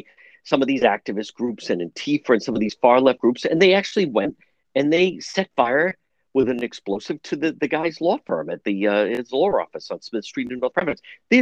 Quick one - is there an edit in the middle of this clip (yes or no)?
no